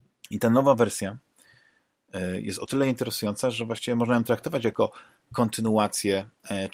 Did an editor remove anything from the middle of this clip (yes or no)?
no